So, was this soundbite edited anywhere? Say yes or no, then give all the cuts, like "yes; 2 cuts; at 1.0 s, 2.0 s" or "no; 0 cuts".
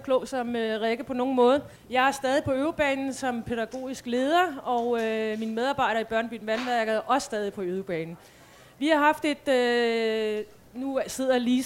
yes; 1 cut; at 1.8 s